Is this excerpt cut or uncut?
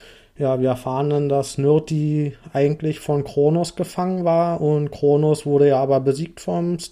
uncut